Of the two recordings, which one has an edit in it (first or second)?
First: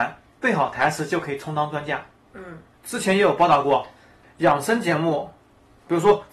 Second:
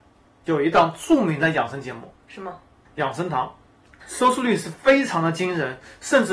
second